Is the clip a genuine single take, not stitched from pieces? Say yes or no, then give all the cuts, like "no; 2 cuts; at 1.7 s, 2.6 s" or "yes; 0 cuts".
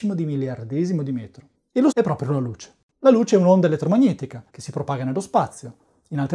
no; 4 cuts; at 1.5 s, 1.9 s, 2.9 s, 4.5 s